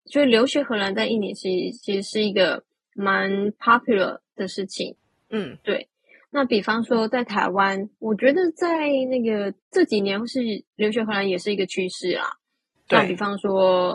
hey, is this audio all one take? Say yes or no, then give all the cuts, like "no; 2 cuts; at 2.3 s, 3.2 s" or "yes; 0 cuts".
yes; 0 cuts